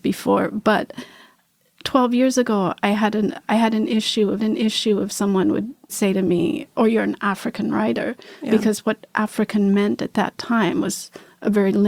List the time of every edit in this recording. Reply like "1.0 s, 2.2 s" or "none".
1.5 s, 4.4 s, 5.9 s, 6.7 s